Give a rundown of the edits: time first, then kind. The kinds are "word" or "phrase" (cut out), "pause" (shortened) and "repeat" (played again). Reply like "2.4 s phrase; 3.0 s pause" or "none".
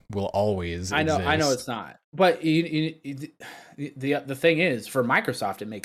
2.0 s pause